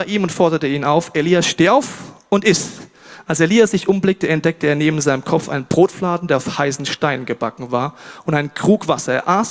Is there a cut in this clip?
no; 0 cuts

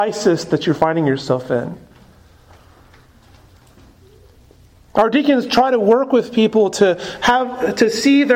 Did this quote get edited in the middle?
no; 0 cuts

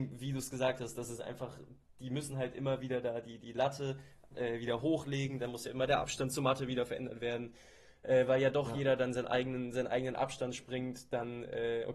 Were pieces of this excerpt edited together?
no; 0 cuts

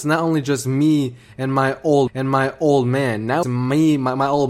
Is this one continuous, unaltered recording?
no; 2 cuts; at 2.1 s, 3.4 s

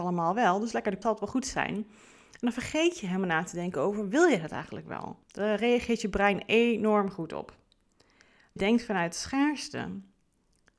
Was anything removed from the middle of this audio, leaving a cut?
yes; 3 cuts; at 1.0 s, 5.2 s, 8.6 s

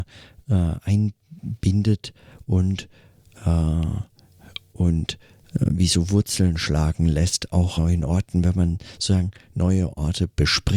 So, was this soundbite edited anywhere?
yes; 1 cut; at 7.8 s

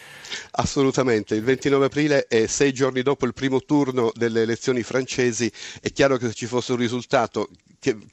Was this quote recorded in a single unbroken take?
yes; 0 cuts

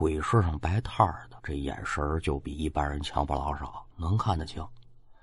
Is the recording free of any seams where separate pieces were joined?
no; 2 cuts; at 1.4 s, 3.9 s

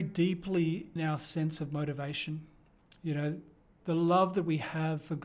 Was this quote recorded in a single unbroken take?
no; 2 cuts; at 1.0 s, 3.8 s

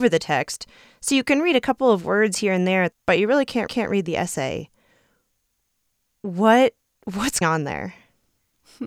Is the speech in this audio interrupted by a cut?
yes; 3 cuts; at 2.9 s, 3.7 s, 7.4 s

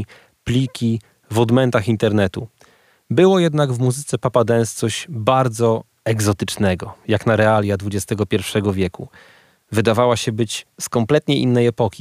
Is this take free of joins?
yes; 0 cuts

